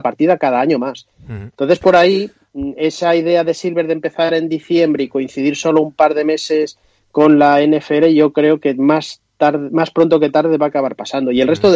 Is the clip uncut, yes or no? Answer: yes